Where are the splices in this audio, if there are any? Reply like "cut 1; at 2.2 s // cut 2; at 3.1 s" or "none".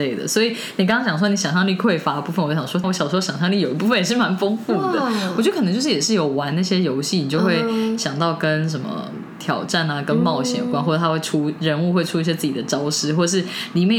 cut 1; at 2.8 s